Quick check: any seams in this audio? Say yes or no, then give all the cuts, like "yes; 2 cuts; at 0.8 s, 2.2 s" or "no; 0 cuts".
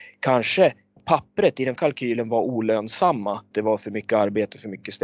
yes; 3 cuts; at 1.0 s, 1.8 s, 3.5 s